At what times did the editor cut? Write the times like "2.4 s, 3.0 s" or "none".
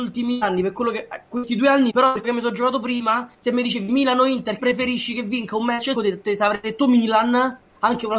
1.9 s, 2.2 s, 3.3 s, 4.6 s, 5.9 s